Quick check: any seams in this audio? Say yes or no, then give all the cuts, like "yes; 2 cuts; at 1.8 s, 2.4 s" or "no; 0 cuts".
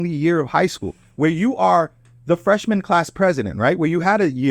no; 0 cuts